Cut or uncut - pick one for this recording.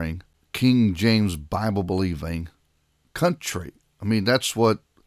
uncut